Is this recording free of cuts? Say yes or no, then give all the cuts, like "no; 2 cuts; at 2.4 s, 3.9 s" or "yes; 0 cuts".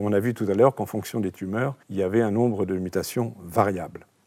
no; 1 cut; at 1.8 s